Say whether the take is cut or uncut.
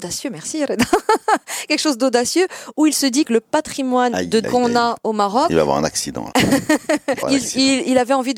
cut